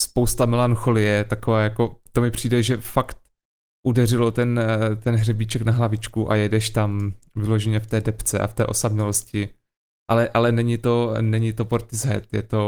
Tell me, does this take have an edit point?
no; 0 cuts

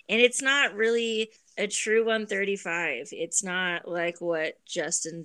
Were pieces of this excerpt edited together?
yes; 1 cut; at 1.4 s

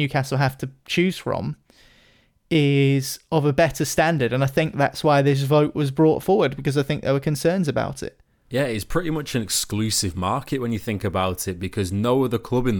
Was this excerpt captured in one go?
yes; 0 cuts

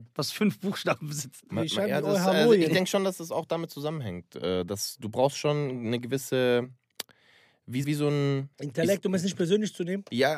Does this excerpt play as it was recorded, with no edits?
no; 2 cuts; at 7.8 s, 8.5 s

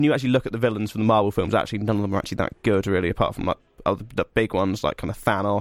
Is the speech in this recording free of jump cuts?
yes; 0 cuts

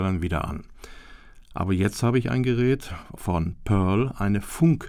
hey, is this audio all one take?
yes; 0 cuts

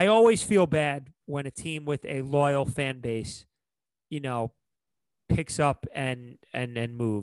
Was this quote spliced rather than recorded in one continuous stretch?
no; 0 cuts

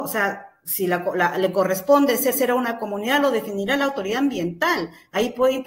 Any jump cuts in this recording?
yes; 1 cut; at 2.3 s

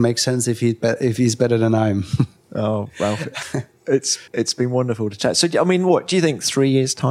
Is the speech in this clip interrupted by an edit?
yes; 1 cut; at 4.3 s

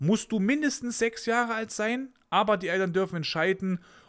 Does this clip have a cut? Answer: no; 0 cuts

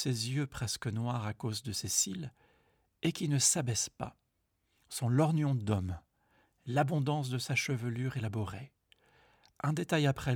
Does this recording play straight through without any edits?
yes; 0 cuts

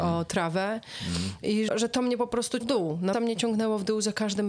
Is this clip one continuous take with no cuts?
no; 3 cuts; at 1.7 s, 2.6 s, 3.1 s

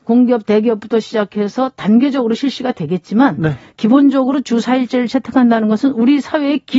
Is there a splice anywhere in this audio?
no; 0 cuts

